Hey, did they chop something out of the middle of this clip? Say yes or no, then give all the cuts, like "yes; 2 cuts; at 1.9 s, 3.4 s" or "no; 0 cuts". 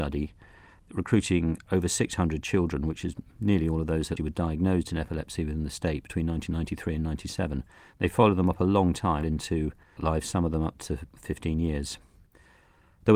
yes; 3 cuts; at 4.2 s, 9.2 s, 10.0 s